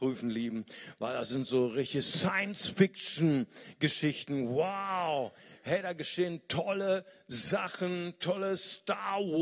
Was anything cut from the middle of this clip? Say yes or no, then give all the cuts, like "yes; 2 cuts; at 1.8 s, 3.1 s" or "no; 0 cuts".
no; 0 cuts